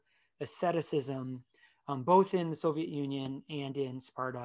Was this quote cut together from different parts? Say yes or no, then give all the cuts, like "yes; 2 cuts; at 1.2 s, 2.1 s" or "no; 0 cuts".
no; 0 cuts